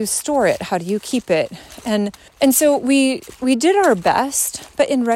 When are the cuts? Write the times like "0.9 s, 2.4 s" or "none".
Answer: 2.3 s

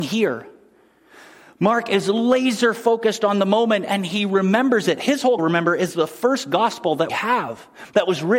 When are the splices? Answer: 5.4 s, 7.1 s

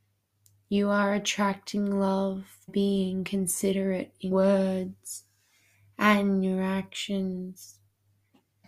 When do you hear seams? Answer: 2.7 s, 4.3 s

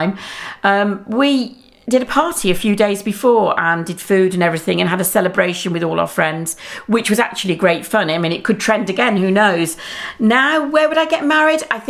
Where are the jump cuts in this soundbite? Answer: none

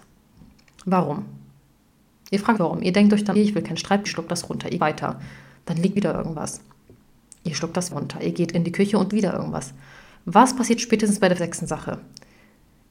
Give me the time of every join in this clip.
2.6 s, 3.4 s, 4.1 s, 4.8 s, 6.0 s, 7.9 s, 9.1 s, 11.4 s

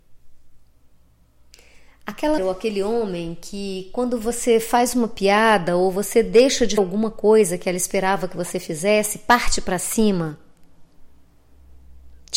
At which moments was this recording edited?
2.4 s, 6.8 s

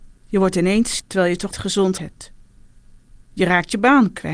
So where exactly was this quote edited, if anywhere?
1.0 s, 1.5 s, 2.0 s

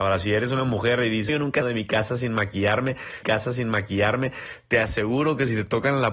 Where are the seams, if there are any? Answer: 1.3 s, 1.6 s, 3.2 s

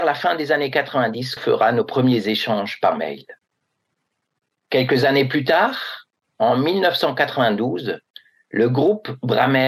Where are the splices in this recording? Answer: 1.4 s

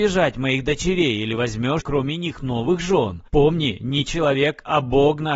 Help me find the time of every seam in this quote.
1.8 s, 3.3 s

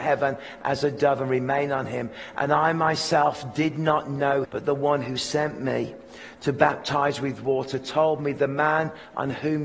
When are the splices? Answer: 4.4 s

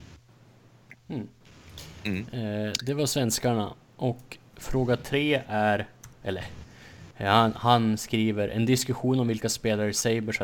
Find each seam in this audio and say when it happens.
6.1 s

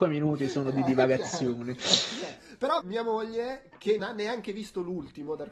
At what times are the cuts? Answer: 2.8 s, 4.0 s

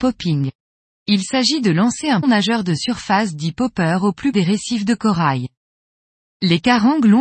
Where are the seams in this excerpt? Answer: 2.2 s, 4.3 s

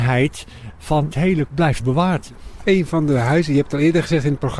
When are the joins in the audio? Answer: 1.1 s, 1.5 s, 1.8 s

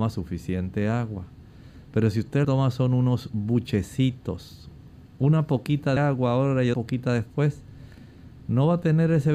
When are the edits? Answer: 2.4 s, 6.0 s, 6.7 s

